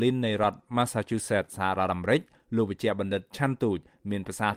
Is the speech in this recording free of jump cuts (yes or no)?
yes